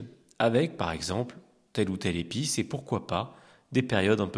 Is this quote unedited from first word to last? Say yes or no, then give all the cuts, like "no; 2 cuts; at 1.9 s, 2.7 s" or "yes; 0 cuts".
yes; 0 cuts